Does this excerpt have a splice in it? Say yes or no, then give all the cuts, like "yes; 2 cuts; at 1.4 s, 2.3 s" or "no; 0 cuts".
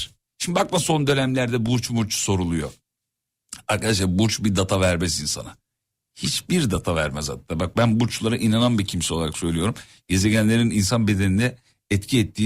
no; 0 cuts